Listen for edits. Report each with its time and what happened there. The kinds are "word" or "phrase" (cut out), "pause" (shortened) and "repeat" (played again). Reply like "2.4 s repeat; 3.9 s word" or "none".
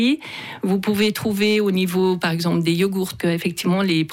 3.2 s word